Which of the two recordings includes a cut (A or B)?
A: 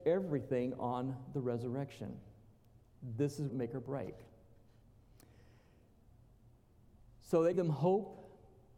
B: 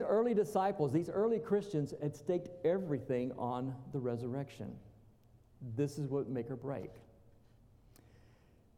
A